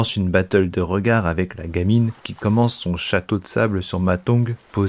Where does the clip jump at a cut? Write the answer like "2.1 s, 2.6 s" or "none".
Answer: 2.2 s